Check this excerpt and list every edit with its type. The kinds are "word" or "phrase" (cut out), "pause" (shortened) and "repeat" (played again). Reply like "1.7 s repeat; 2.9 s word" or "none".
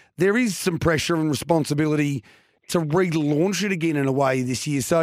none